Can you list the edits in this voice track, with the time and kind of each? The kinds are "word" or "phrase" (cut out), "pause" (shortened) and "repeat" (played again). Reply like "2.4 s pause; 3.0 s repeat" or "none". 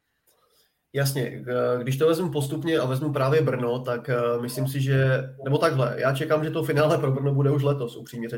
none

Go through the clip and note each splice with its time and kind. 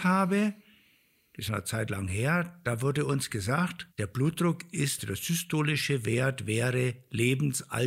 1.5 s word; 3.9 s pause; 5.0 s word

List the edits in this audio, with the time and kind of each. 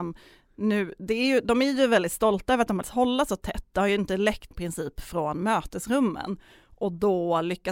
2.8 s word; 4.5 s word

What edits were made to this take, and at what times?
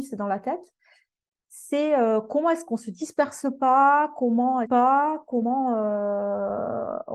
4.6 s phrase

